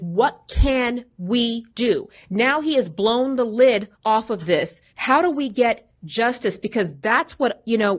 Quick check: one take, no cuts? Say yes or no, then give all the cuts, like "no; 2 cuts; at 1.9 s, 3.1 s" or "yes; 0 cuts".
no; 3 cuts; at 1.7 s, 3.9 s, 4.9 s